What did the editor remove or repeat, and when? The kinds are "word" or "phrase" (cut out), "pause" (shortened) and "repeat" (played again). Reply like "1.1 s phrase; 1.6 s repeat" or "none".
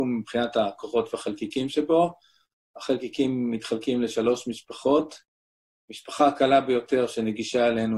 none